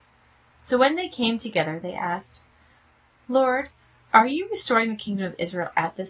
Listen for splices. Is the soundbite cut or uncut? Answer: uncut